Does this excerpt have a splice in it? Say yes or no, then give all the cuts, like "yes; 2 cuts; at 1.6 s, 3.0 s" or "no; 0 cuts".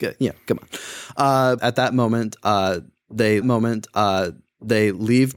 yes; 2 cuts; at 1.6 s, 3.4 s